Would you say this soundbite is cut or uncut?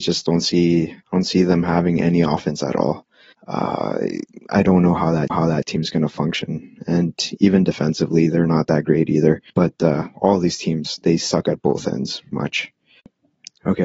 cut